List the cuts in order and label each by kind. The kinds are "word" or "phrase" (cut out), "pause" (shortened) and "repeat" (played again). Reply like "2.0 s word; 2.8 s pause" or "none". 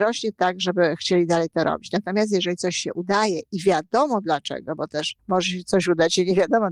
5.2 s pause